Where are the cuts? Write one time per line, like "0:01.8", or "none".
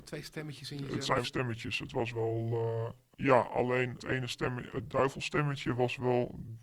0:01.2
0:03.1
0:04.0
0:04.7